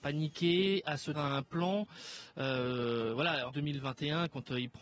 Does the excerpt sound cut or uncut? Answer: cut